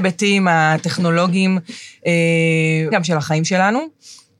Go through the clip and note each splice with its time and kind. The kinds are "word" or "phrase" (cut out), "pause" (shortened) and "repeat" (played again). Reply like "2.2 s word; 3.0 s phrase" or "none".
2.9 s word